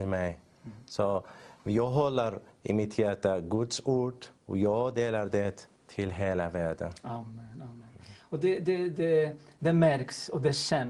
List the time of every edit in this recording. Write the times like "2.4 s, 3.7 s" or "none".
4.4 s, 5.8 s